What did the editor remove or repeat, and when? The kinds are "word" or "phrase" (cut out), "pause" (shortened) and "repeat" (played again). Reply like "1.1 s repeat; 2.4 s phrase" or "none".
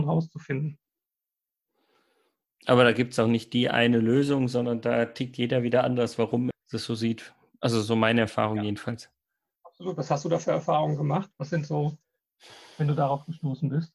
6.5 s word